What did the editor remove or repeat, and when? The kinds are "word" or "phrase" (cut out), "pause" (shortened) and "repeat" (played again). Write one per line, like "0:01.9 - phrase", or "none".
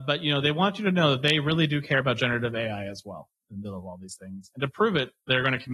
none